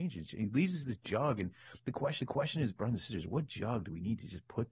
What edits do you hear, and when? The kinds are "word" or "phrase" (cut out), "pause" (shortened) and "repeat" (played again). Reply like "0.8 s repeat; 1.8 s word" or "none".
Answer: 2.2 s repeat